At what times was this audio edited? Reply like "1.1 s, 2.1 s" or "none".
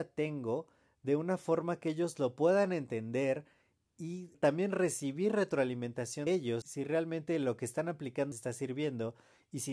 4.3 s, 6.3 s, 6.6 s, 8.3 s